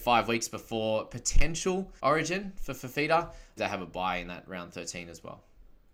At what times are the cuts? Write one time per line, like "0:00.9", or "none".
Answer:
0:02.0
0:03.6